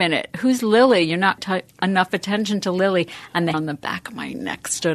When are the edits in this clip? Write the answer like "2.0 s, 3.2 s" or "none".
1.4 s, 3.5 s